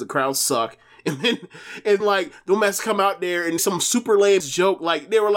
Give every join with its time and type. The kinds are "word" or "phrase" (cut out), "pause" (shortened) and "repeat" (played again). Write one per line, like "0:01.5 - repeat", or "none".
0:02.0 - word
0:03.6 - word
0:04.4 - word